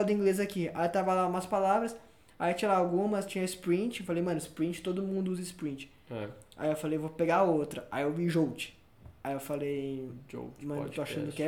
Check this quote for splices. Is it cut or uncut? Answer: uncut